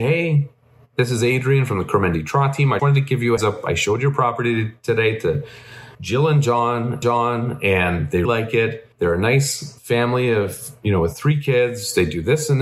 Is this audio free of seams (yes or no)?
no